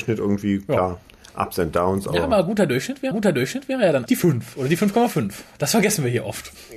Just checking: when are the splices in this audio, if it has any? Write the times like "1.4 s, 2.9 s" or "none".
3.1 s, 4.1 s